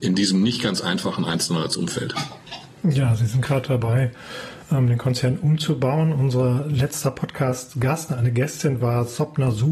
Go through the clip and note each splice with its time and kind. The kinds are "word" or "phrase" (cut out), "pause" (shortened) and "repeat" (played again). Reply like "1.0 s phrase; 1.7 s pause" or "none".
none